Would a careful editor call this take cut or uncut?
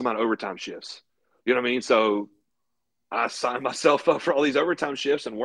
uncut